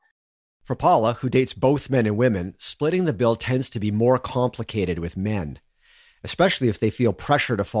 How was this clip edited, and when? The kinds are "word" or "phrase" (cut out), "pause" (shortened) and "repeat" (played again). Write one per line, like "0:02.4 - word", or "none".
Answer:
none